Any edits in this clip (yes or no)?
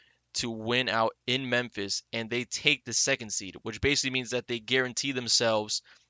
no